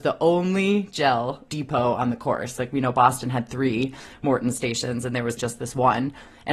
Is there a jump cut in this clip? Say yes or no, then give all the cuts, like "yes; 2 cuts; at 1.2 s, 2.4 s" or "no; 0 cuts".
yes; 2 cuts; at 1.5 s, 5.4 s